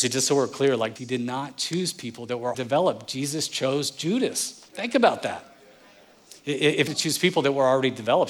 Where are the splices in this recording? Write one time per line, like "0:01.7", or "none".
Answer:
0:01.0
0:02.5
0:04.7
0:06.9